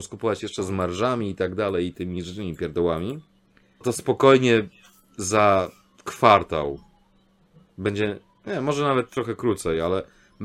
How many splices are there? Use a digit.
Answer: 1